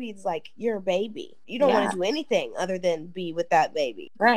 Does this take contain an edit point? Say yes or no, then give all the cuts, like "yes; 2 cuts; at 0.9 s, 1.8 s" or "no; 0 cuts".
no; 0 cuts